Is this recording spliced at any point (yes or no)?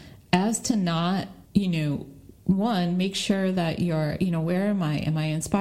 yes